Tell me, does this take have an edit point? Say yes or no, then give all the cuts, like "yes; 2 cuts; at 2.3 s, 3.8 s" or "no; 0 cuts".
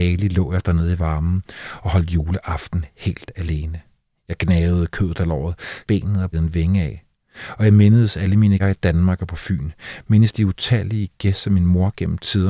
yes; 3 cuts; at 5.8 s, 6.3 s, 8.6 s